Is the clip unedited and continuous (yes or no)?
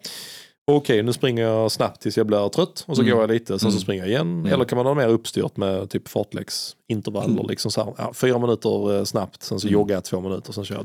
yes